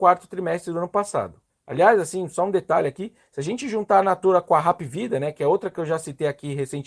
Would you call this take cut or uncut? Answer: cut